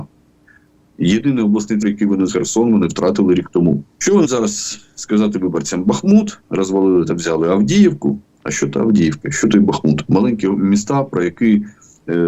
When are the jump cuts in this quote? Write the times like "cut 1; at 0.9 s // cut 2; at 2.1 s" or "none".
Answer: cut 1; at 1.8 s // cut 2; at 2.3 s // cut 3; at 3.9 s // cut 4; at 4.2 s // cut 5; at 6.4 s

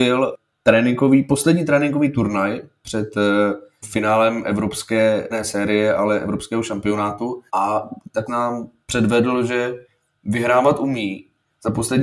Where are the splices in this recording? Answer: cut 1; at 3.8 s // cut 2; at 5.3 s // cut 3; at 7.5 s // cut 4; at 8.3 s

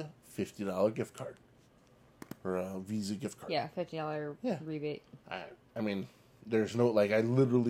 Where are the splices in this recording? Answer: cut 1; at 5.2 s

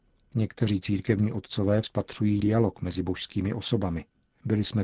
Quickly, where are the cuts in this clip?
cut 1; at 1.8 s // cut 2; at 2.4 s

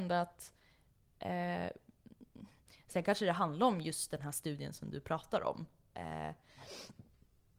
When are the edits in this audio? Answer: none

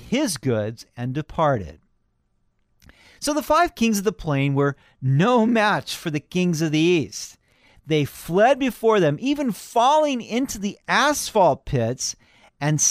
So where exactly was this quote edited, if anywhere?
none

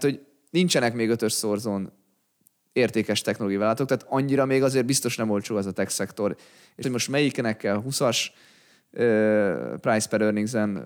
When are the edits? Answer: cut 1; at 6.8 s

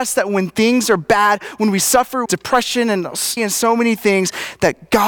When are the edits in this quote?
cut 1; at 2.3 s // cut 2; at 3.4 s

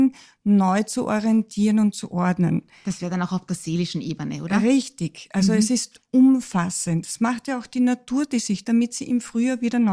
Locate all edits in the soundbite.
cut 1; at 8.6 s

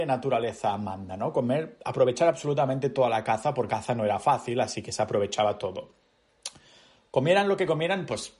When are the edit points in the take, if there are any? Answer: cut 1; at 3.7 s

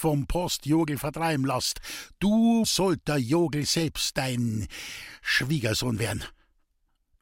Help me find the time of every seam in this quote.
cut 1; at 2.6 s

